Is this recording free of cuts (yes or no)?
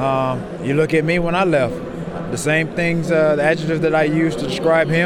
yes